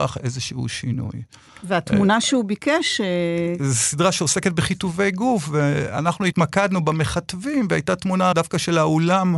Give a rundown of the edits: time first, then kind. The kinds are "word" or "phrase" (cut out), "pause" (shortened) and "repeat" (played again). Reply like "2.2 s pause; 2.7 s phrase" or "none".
8.3 s word